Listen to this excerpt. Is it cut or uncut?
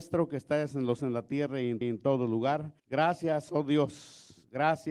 cut